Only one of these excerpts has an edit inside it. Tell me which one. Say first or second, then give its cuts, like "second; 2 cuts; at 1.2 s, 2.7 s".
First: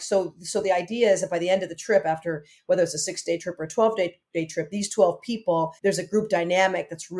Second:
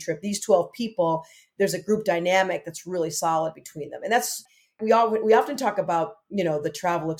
first; 1 cut; at 5.8 s